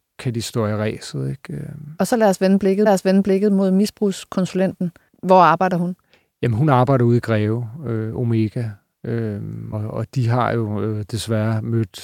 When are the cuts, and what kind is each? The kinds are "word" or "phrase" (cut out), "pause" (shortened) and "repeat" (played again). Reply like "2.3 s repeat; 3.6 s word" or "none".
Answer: 2.9 s repeat; 9.7 s word